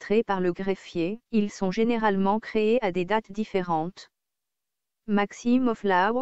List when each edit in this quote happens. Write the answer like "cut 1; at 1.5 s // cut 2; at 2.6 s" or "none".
cut 1; at 1.2 s

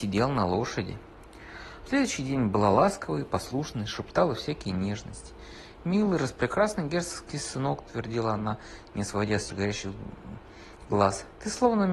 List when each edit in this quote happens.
cut 1; at 9.5 s

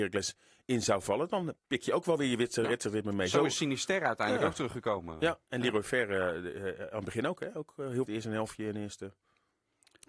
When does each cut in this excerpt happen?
cut 1; at 1.6 s // cut 2; at 8.1 s

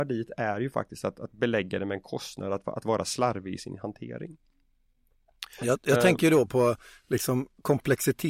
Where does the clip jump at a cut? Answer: none

